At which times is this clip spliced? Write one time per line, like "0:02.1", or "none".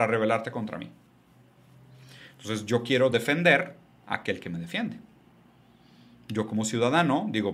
none